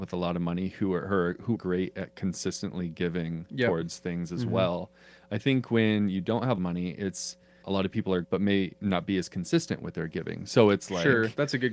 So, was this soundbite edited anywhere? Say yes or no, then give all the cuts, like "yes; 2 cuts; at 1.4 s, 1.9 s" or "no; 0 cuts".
yes; 5 cuts; at 1.5 s, 6.6 s, 7.6 s, 8.2 s, 8.8 s